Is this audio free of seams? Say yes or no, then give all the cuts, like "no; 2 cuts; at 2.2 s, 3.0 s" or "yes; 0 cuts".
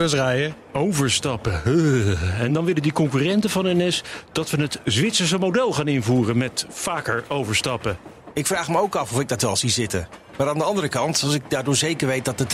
yes; 0 cuts